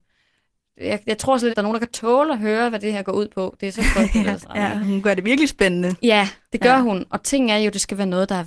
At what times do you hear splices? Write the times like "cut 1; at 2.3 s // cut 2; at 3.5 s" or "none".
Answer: cut 1; at 1.5 s // cut 2; at 4.4 s // cut 3; at 4.8 s